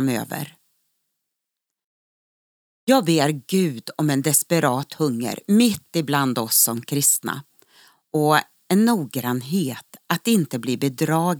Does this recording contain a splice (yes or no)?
no